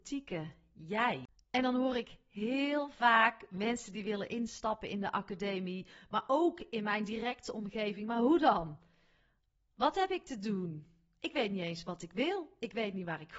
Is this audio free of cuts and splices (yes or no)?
yes